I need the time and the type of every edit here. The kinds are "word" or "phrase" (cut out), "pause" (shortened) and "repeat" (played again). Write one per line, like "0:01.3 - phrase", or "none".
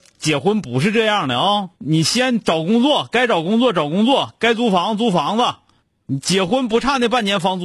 0:01.7 - pause
0:05.8 - pause